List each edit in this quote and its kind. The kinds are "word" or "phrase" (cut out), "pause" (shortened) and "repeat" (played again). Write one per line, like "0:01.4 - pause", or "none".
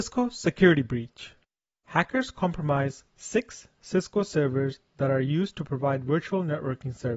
none